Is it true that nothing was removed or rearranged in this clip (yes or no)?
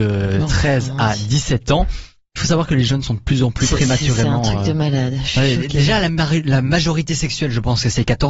yes